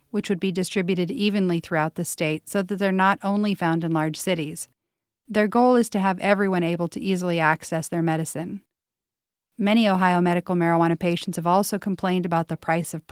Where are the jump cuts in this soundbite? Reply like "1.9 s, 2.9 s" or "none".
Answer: none

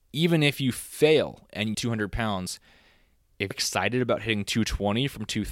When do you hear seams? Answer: 1.7 s, 3.5 s

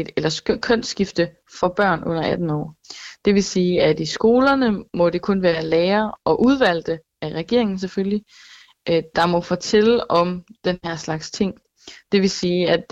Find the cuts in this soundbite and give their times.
none

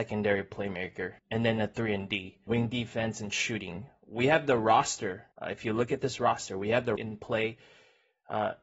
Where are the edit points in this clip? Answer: 1.2 s, 2.5 s, 5.3 s, 7.0 s

